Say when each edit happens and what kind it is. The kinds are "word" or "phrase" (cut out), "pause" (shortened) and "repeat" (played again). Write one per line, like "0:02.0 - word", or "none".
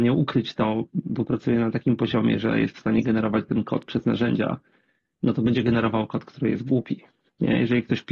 none